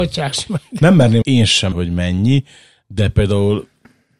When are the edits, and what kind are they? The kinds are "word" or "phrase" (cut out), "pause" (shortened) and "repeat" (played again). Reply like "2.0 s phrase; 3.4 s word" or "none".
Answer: 1.2 s word; 1.7 s word